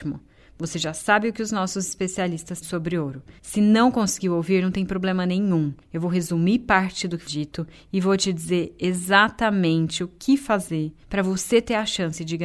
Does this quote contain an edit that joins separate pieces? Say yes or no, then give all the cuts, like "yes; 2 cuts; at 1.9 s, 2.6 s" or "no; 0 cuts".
yes; 5 cuts; at 2.6 s, 3.4 s, 5.8 s, 7.3 s, 11.0 s